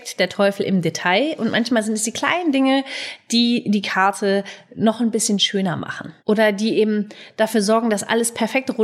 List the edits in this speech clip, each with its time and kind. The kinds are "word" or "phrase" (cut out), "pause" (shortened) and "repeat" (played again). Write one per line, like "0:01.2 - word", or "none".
0:06.2 - pause